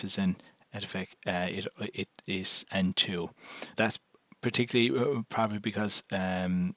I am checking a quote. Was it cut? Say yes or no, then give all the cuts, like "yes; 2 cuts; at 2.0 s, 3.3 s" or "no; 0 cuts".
yes; 2 cuts; at 2.6 s, 3.7 s